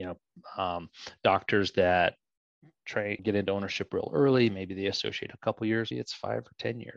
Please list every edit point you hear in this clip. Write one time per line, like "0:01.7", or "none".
0:03.2
0:05.9